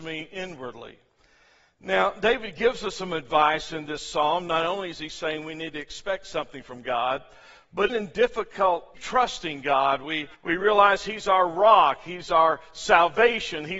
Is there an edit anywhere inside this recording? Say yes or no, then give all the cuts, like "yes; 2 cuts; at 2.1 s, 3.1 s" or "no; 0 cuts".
yes; 3 cuts; at 7.9 s, 8.9 s, 10.3 s